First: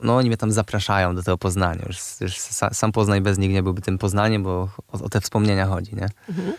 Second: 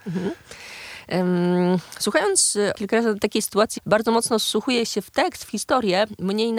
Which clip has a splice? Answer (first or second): second